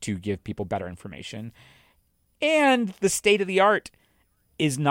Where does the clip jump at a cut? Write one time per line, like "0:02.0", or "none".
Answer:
none